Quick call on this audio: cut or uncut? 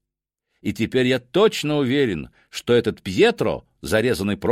uncut